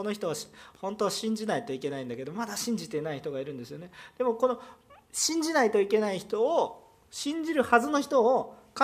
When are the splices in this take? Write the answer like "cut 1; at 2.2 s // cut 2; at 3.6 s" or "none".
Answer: cut 1; at 5.0 s